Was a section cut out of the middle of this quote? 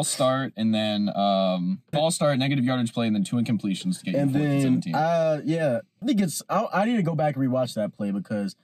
yes; 2 cuts; at 1.9 s, 6.0 s

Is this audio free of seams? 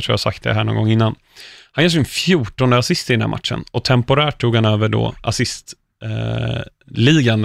yes; 0 cuts

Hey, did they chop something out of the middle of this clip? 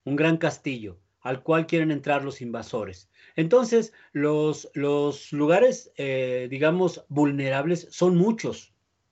no; 0 cuts

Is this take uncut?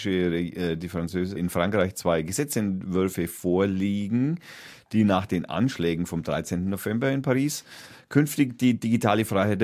no; 1 cut; at 1.4 s

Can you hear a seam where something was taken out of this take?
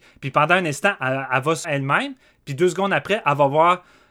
yes; 1 cut; at 1.6 s

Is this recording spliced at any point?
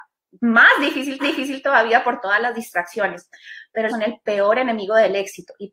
yes; 2 cuts; at 1.2 s, 3.9 s

